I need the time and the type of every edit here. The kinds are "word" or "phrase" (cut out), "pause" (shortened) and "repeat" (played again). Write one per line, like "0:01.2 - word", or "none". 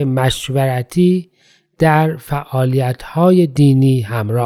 none